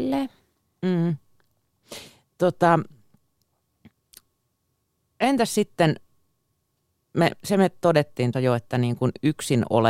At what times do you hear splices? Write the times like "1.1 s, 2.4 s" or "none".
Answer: 8.3 s